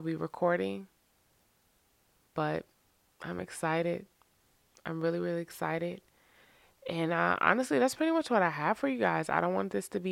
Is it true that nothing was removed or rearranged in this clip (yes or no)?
yes